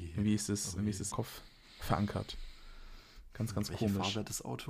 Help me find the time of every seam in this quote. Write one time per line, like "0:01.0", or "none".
0:01.1